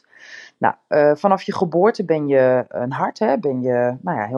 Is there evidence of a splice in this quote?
no; 0 cuts

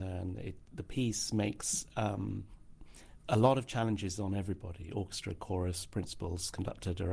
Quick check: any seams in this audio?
no; 0 cuts

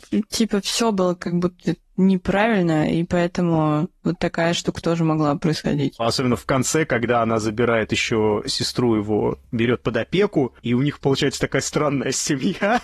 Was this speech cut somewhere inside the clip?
no; 0 cuts

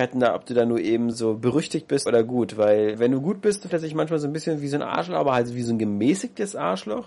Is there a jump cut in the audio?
yes; 4 cuts; at 1.1 s, 2.1 s, 2.9 s, 3.7 s

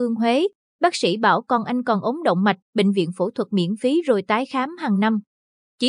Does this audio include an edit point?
yes; 1 cut; at 2.6 s

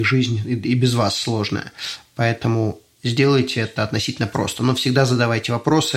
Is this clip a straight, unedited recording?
yes; 0 cuts

